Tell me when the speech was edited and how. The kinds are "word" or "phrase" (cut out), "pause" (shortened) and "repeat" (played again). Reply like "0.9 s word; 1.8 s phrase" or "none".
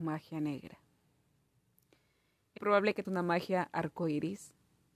2.6 s word; 3.0 s word